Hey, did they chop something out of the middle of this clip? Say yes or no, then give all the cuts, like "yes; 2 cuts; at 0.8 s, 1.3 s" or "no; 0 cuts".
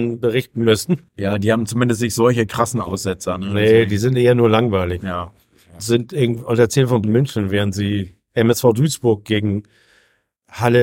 yes; 3 cuts; at 1.1 s, 5.8 s, 7.0 s